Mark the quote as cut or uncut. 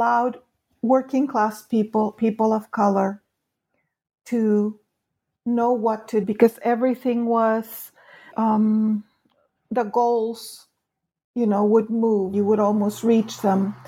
cut